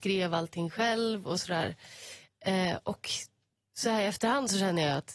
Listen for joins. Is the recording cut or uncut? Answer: uncut